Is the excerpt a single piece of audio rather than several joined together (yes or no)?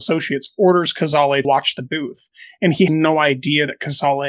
no